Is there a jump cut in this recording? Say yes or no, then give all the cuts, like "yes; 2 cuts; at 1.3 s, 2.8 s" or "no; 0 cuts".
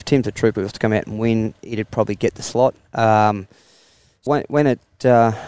yes; 1 cut; at 4.3 s